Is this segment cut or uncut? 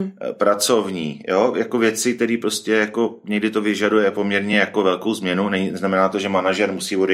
uncut